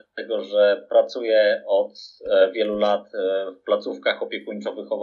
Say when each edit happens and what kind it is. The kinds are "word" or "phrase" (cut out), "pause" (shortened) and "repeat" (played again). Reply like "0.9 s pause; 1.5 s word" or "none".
2.5 s word

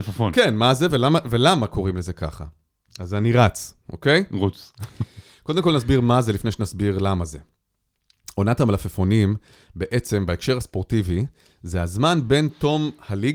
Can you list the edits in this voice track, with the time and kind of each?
none

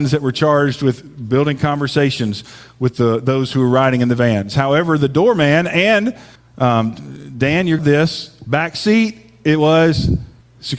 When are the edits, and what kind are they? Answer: 7.8 s phrase

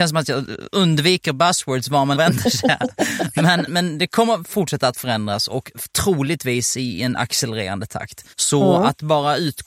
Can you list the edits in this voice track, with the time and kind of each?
2.1 s phrase; 3.7 s word; 8.3 s pause

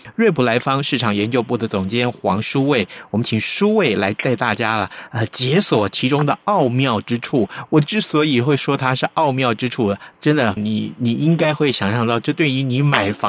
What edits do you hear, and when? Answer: 10.6 s phrase

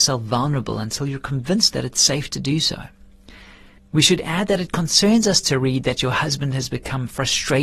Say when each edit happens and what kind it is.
none

